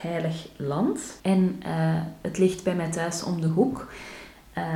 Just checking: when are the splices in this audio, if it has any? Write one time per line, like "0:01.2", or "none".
0:01.2